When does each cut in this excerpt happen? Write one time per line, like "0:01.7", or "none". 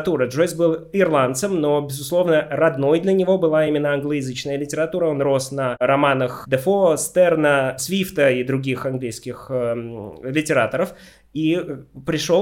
none